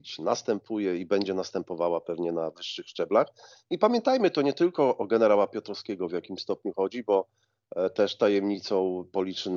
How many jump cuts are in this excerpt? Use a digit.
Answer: 0